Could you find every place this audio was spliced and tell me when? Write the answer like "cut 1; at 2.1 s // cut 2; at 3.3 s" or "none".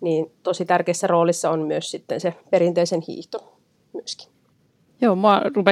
cut 1; at 2.4 s // cut 2; at 4.8 s

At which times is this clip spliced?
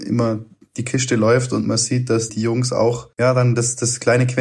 cut 1; at 1.6 s // cut 2; at 2.3 s // cut 3; at 3.1 s

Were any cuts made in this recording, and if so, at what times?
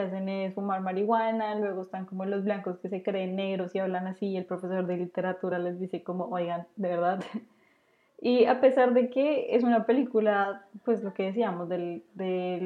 none

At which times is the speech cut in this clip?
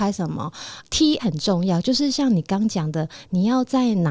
cut 1; at 1.2 s

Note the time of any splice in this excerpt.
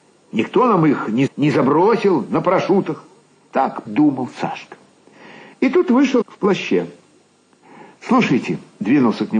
cut 1; at 1.3 s // cut 2; at 3.9 s // cut 3; at 6.2 s

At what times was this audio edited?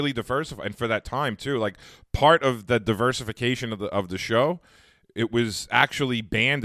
none

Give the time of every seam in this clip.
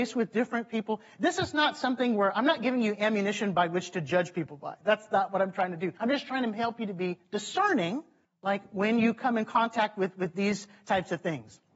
cut 1; at 6.0 s // cut 2; at 8.2 s

